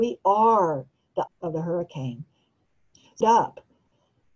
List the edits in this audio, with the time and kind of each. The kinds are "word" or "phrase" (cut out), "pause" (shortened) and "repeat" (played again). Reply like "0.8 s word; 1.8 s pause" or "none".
1.3 s word; 3.2 s word